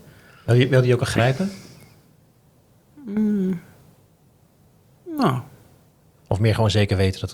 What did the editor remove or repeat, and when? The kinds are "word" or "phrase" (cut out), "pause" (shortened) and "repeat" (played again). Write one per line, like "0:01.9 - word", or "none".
0:01.0 - word

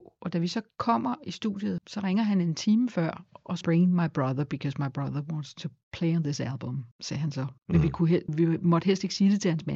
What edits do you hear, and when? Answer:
0:01.8 - phrase
0:03.6 - phrase
0:06.9 - pause
0:07.6 - pause
0:08.3 - word

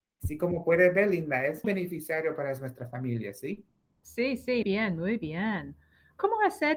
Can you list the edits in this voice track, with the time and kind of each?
0:01.6 - word
0:04.6 - word

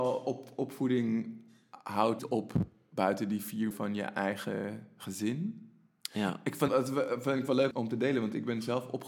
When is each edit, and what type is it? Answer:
0:02.2 - word
0:03.7 - word
0:06.7 - word
0:07.7 - word

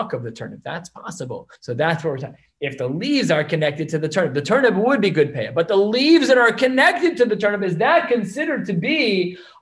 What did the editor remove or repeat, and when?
0:01.6 - pause

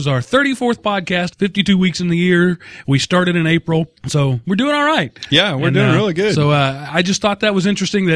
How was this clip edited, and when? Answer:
0:01.3 - phrase
0:04.0 - pause

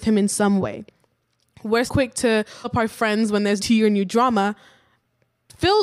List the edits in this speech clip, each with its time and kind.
0:01.9 - word
0:02.6 - word
0:03.6 - word

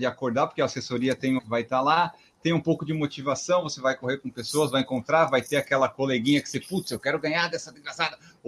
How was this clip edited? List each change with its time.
0:01.4 - phrase

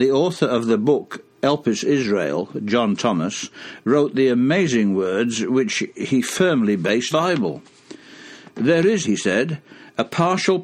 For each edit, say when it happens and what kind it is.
0:07.1 - phrase
0:09.0 - word

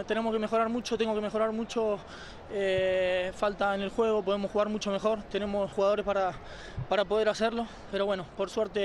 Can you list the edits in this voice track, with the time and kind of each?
0:05.7 - word

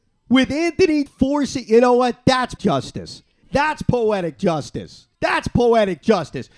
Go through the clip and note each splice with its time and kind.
0:01.1 - word
0:02.6 - word
0:03.4 - pause
0:05.1 - pause

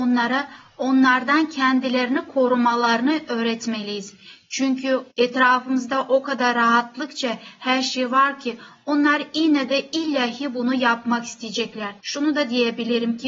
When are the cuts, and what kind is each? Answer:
0:05.1 - pause
0:12.0 - pause

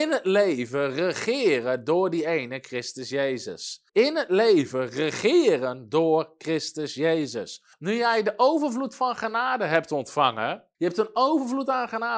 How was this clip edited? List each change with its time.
0:03.9 - pause
0:07.7 - pause
0:10.7 - pause

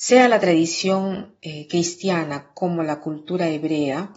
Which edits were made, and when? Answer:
none

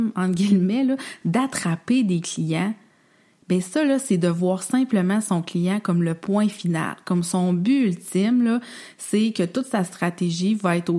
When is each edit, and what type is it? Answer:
none

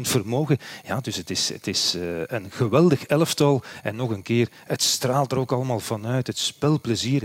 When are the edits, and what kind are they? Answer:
none

